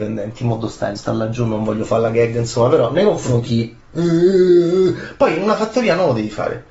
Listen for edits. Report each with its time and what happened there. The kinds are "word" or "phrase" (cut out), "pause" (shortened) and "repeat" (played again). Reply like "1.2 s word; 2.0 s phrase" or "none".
1.0 s word; 3.4 s word